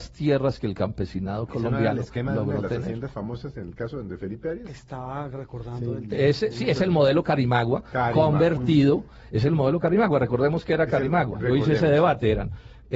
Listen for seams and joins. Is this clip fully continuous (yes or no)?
yes